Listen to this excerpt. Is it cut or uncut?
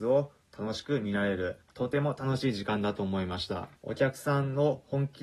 cut